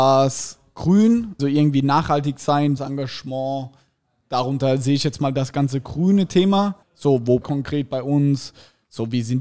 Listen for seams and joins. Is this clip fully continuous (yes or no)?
no